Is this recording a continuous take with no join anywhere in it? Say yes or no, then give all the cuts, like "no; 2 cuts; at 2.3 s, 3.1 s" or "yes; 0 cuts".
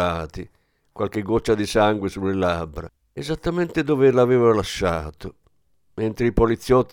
yes; 0 cuts